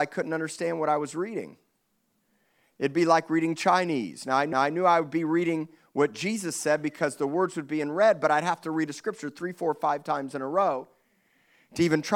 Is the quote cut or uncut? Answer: cut